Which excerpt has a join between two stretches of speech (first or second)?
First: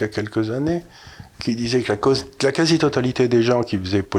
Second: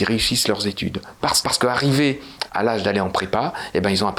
second